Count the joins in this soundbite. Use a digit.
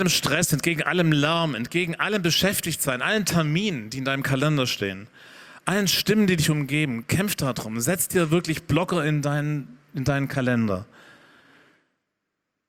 0